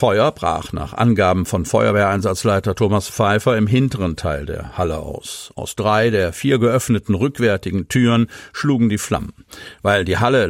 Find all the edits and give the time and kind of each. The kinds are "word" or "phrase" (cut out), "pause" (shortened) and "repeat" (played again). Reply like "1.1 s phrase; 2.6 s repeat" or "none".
none